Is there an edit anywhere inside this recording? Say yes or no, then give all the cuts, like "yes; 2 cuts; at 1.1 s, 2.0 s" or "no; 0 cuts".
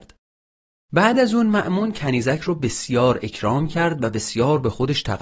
no; 0 cuts